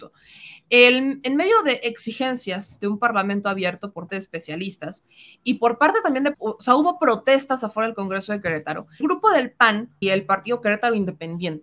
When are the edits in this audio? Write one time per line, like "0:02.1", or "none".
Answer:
0:04.1
0:06.3
0:09.0
0:10.0